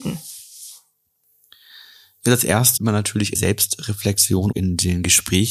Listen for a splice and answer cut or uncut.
cut